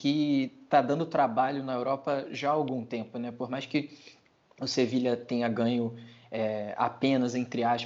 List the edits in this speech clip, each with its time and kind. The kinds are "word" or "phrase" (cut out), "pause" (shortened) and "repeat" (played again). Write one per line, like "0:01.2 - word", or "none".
none